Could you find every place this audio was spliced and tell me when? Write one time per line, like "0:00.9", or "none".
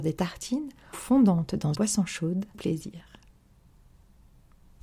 0:00.9
0:01.7
0:02.5